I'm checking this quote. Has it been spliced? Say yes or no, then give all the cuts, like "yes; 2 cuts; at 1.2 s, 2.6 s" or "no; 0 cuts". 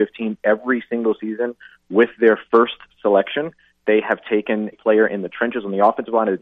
yes; 1 cut; at 4.7 s